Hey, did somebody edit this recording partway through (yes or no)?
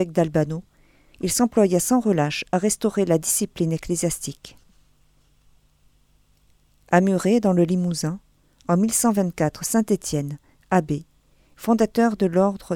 no